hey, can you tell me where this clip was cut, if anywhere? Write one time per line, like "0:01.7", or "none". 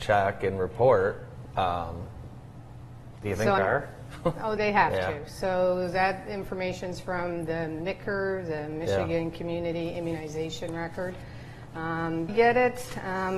0:03.6
0:04.6
0:12.3